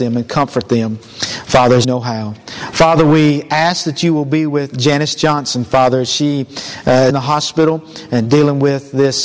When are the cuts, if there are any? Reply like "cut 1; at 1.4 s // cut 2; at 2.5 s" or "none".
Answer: cut 1; at 1.8 s // cut 2; at 4.7 s // cut 3; at 7.1 s